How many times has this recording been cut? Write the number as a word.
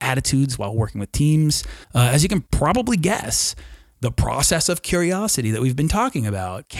one